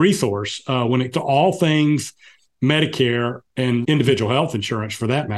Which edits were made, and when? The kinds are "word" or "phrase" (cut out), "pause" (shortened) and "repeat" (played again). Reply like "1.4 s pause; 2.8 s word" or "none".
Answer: 1.1 s word; 3.8 s word